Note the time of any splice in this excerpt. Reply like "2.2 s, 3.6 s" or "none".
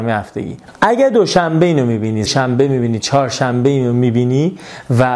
2.3 s